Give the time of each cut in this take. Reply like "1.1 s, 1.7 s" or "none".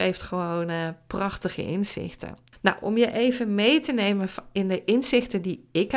2.5 s